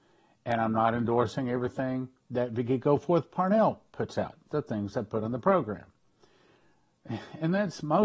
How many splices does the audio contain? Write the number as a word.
one